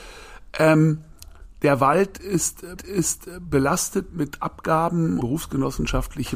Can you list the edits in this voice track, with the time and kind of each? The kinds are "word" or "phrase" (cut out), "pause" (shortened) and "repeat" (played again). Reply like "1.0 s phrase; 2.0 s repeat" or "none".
2.8 s repeat; 5.2 s phrase